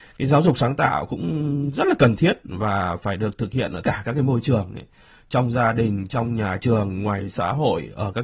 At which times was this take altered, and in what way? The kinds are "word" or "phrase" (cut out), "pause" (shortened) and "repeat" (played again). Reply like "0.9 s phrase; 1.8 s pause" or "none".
3.8 s word